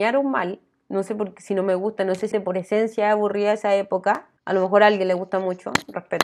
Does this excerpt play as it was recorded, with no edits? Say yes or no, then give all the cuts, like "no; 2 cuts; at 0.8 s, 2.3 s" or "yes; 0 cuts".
no; 2 cuts; at 2.3 s, 4.4 s